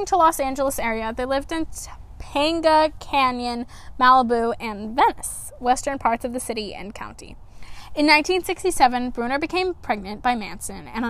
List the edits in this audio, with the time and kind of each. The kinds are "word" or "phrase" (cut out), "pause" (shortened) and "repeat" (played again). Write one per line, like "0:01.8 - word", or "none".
none